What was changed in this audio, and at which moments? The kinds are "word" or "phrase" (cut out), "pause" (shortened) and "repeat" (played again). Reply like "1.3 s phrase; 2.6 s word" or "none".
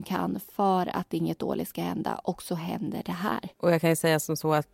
3.5 s pause